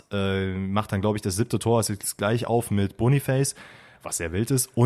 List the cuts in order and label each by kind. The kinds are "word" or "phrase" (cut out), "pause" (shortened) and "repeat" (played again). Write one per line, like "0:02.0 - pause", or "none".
none